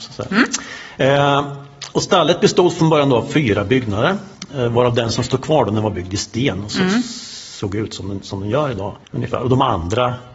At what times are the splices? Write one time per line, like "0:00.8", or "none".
0:09.0